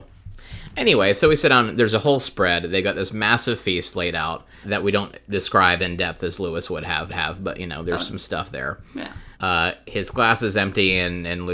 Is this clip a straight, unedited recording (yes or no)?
no